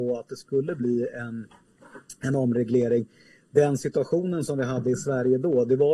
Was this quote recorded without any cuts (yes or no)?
yes